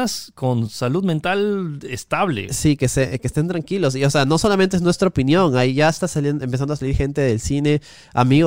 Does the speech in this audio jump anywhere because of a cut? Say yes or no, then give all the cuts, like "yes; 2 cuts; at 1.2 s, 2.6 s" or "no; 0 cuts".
no; 0 cuts